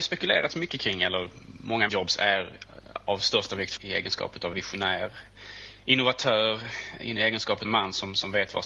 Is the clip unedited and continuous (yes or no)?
no